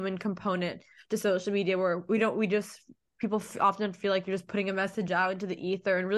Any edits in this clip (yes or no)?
no